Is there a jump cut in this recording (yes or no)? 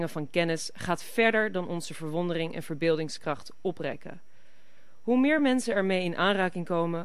no